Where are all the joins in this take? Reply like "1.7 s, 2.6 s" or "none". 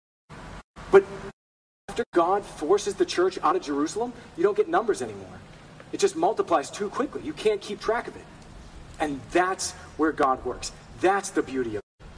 1.5 s

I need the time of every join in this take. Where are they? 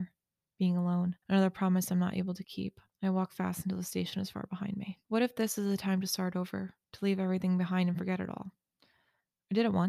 1.2 s, 2.9 s, 5.0 s, 6.8 s

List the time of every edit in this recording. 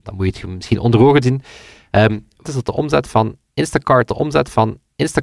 1.2 s, 2.4 s, 4.1 s

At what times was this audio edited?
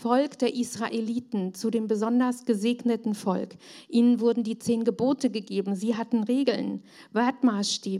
none

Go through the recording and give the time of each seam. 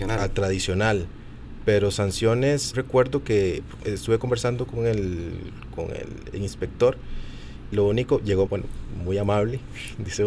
2.7 s, 3.8 s, 7.7 s, 8.5 s

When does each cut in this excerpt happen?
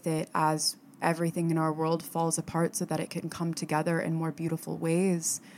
none

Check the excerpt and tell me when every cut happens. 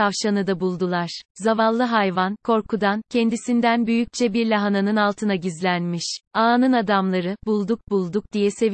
1.3 s, 6.2 s

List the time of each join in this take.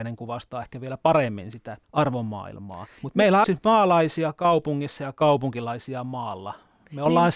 1.8 s, 3.4 s

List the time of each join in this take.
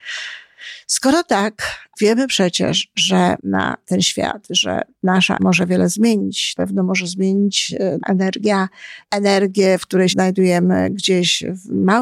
1.9 s, 3.4 s, 5.4 s, 6.6 s, 8.0 s, 9.0 s, 10.1 s

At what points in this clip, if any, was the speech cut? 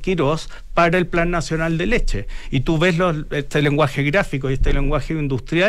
none

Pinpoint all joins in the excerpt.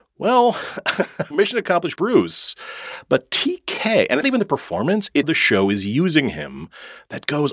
1.3 s, 2.0 s, 4.2 s, 5.2 s

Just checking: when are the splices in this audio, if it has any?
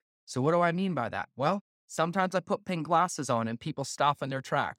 none

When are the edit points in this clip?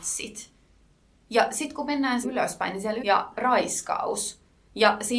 2.2 s, 3.0 s

